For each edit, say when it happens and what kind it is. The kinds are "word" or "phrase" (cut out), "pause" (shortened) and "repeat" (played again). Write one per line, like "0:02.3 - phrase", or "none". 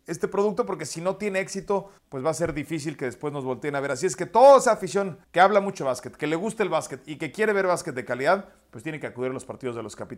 0:02.0 - pause
0:05.2 - pause

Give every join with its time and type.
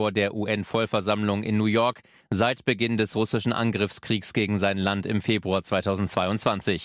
none

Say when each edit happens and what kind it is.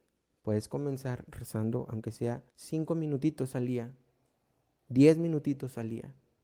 0:02.5 - pause

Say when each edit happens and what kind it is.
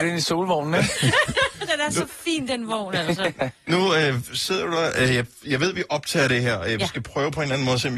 none

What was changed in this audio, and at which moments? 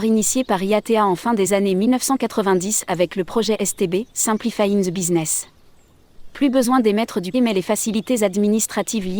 0:04.1 - pause
0:07.3 - word

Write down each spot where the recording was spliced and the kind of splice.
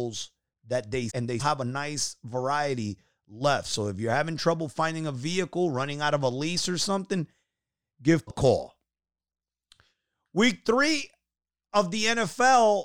0:01.1 - word
0:01.4 - word
0:08.3 - word

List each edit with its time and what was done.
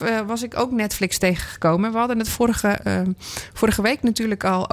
none

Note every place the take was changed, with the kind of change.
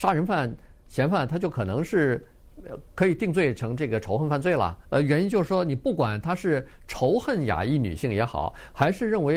0:04.8 - pause

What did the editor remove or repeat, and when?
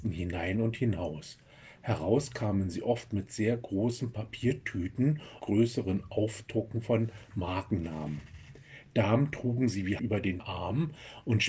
0:05.4 - phrase
0:10.0 - word
0:10.4 - word

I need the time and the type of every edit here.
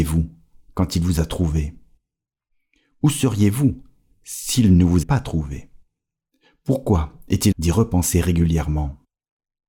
0:05.0 - word
0:07.5 - word

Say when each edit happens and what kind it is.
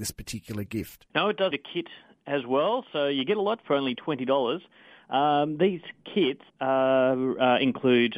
0:01.1 - pause
0:01.5 - word
0:03.6 - word
0:06.5 - pause

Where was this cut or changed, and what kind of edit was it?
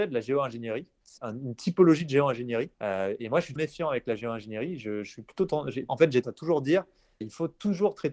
0:01.2 - word
0:02.7 - pause
0:03.6 - word
0:05.9 - word
0:06.2 - word
0:07.2 - word

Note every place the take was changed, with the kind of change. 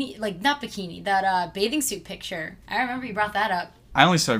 0:02.6 - pause

